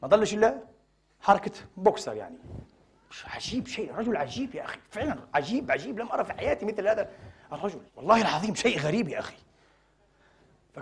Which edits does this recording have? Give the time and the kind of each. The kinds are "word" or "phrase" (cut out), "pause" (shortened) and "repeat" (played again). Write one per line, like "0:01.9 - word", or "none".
0:07.9 - pause